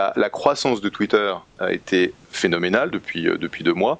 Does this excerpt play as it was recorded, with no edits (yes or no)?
yes